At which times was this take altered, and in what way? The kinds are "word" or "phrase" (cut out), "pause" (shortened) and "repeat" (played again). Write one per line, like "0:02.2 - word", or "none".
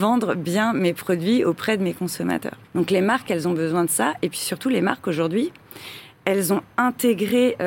0:02.6 - pause